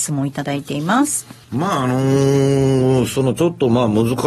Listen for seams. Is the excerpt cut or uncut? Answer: cut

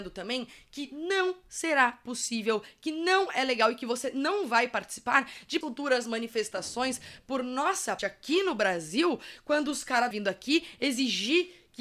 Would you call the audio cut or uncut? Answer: cut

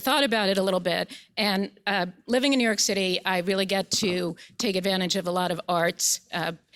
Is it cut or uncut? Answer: uncut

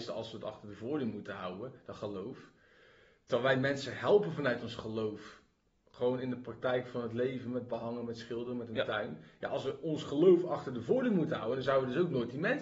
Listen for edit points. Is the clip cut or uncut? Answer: uncut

